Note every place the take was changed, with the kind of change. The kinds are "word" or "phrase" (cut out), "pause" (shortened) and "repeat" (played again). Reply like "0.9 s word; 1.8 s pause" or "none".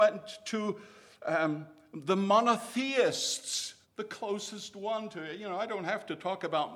3.8 s pause